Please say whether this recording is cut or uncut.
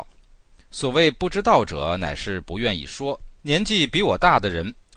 cut